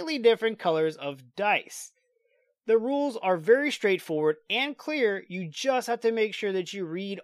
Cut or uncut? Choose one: uncut